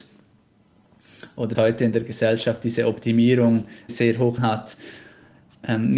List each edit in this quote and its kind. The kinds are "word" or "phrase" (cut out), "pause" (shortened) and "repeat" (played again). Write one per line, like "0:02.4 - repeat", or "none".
0:01.5 - word
0:03.9 - word
0:04.4 - word